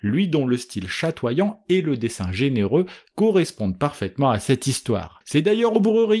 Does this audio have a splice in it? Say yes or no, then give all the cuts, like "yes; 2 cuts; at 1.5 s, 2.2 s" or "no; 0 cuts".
yes; 1 cut; at 5.2 s